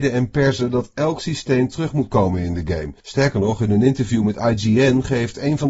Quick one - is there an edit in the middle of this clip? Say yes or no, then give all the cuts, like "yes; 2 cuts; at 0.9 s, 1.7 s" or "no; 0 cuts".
yes; 1 cut; at 3.0 s